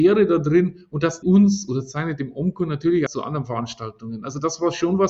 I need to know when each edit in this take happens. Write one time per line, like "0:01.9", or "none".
0:01.2
0:03.1